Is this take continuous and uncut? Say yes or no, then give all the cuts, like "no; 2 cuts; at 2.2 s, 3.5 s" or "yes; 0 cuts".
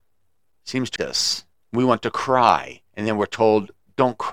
no; 3 cuts; at 1.0 s, 1.5 s, 2.9 s